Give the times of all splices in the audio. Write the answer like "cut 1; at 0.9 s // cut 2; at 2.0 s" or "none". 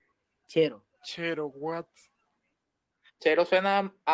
cut 1; at 0.9 s